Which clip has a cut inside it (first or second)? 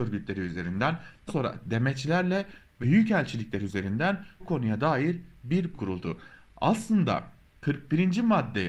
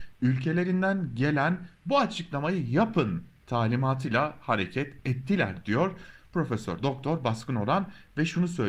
first